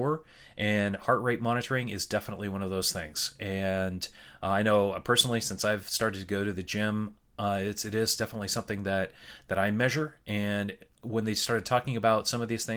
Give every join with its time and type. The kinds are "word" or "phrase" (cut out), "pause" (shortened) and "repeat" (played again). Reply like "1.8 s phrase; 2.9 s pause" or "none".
none